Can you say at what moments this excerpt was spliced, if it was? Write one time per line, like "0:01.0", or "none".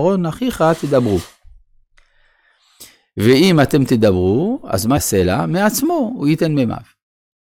0:05.0